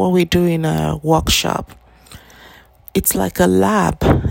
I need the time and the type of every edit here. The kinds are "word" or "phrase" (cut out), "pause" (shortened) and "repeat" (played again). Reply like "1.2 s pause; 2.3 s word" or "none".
none